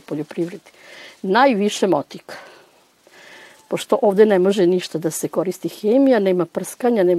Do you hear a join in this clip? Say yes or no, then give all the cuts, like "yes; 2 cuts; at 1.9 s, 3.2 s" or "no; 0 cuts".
no; 0 cuts